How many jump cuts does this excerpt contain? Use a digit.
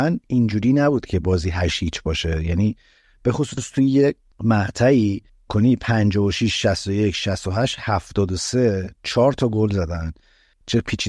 1